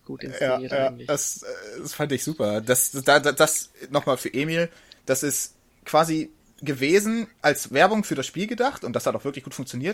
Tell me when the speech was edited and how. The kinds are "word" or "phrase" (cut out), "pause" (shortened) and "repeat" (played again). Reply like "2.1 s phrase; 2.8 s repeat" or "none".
none

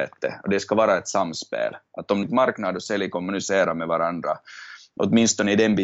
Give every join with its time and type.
2.2 s phrase

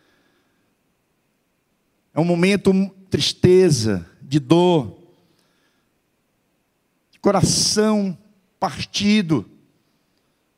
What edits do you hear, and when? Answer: 3.1 s word

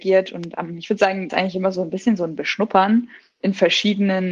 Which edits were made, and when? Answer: 1.3 s phrase

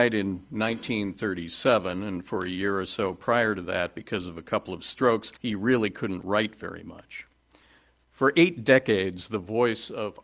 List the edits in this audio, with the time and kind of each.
5.4 s pause

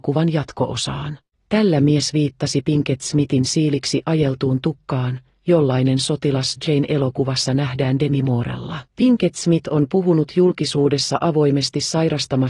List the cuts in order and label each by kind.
1.3 s pause; 8.9 s pause

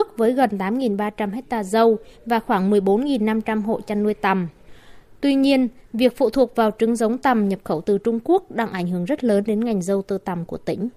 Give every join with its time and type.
none

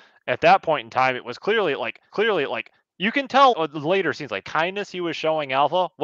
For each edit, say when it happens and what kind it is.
2.1 s repeat; 3.5 s word; 4.4 s word

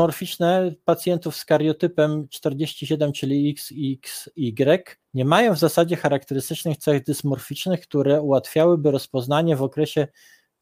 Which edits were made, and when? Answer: 5.0 s pause

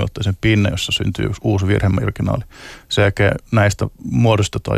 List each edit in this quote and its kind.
none

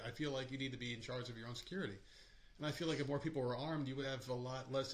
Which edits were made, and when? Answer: none

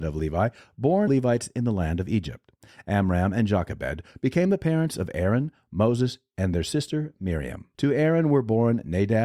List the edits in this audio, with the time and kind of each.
1.1 s phrase; 7.7 s pause

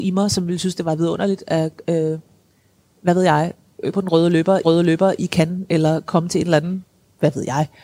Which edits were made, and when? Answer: 3.9 s word; 4.6 s repeat

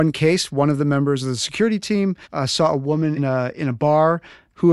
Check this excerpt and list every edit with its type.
2.2 s pause; 3.2 s word

